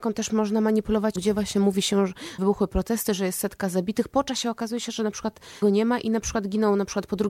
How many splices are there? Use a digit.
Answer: 3